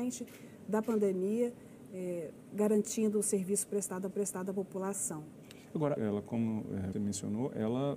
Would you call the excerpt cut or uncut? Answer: cut